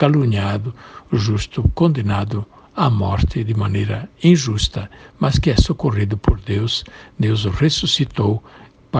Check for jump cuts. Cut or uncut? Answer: uncut